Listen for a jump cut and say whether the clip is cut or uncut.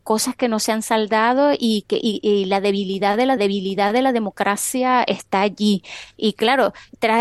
cut